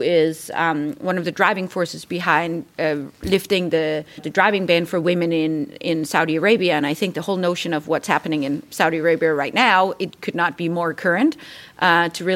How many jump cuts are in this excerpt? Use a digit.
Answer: 1